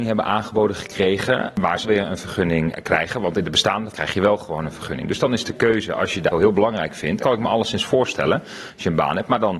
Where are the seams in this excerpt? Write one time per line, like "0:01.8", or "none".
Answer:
0:01.8
0:03.9
0:06.3
0:07.2